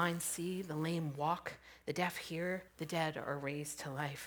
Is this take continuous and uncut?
no; 1 cut; at 2.7 s

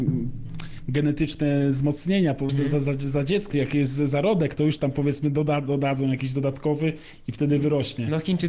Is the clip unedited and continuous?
no; 2 cuts; at 2.5 s, 3.5 s

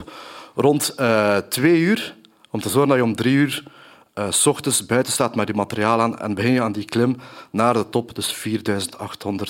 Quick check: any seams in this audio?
no; 0 cuts

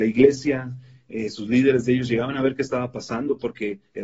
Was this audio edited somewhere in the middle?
no; 0 cuts

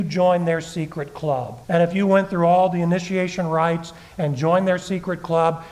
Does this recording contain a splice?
yes; 1 cut; at 1.6 s

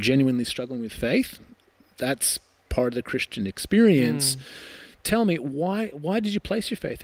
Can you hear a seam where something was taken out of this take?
no; 0 cuts

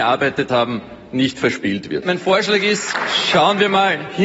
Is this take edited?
no; 0 cuts

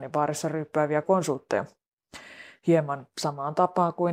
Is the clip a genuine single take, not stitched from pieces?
no; 1 cut; at 1.0 s

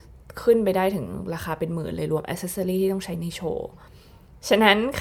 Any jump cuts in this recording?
no; 0 cuts

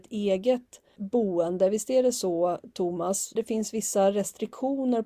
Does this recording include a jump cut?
yes; 1 cut; at 3.3 s

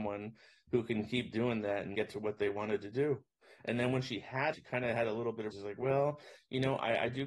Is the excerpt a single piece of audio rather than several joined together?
no; 3 cuts; at 1.9 s, 4.5 s, 5.5 s

